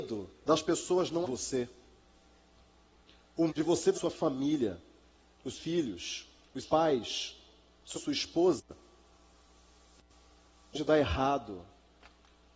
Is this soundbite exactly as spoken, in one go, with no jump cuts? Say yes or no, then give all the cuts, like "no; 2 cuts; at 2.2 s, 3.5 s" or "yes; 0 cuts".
no; 7 cuts; at 1.2 s, 3.5 s, 3.9 s, 5.5 s, 6.6 s, 7.9 s, 10.7 s